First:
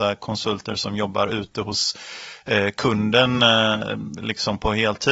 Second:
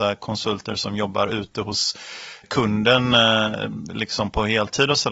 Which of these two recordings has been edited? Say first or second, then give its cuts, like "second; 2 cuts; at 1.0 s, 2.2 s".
second; 1 cut; at 2.4 s